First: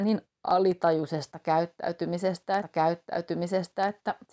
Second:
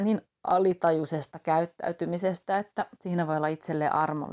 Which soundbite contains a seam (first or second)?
first